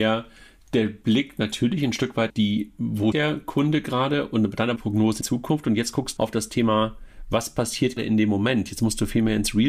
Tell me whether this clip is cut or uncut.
cut